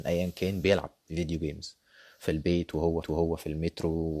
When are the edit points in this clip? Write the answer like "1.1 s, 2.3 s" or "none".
3.0 s